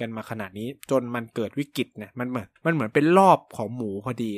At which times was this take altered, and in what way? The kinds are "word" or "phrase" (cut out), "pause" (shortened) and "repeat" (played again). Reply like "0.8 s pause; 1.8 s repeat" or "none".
2.6 s pause